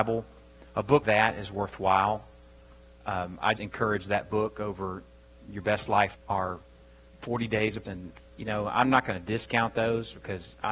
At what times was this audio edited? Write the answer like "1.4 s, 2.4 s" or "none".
1.0 s, 3.6 s, 6.1 s, 7.8 s